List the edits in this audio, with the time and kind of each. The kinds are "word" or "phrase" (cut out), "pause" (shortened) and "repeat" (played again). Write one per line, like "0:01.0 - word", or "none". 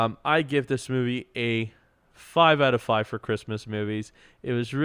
none